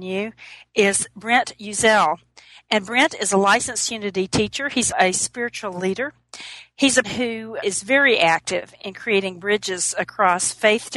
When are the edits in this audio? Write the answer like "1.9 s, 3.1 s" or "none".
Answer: 4.9 s, 7.0 s, 7.6 s